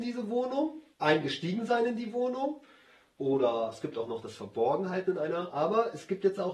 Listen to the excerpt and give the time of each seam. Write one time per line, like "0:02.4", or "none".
0:00.9